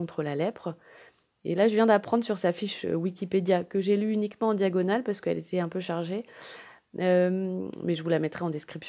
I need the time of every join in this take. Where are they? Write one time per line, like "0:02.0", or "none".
none